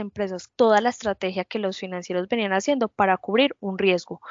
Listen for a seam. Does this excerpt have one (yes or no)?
no